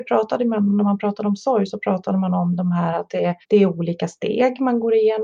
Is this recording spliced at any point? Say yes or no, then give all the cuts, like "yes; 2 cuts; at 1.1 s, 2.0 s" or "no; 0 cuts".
yes; 1 cut; at 3.4 s